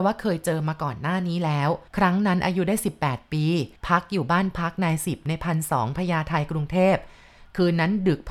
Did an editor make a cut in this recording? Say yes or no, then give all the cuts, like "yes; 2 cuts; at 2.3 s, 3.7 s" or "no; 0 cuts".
yes; 2 cuts; at 1.9 s, 3.8 s